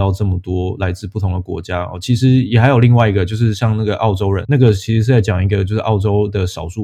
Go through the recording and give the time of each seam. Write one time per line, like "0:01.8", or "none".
0:04.5